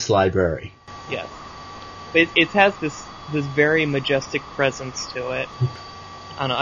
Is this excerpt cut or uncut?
cut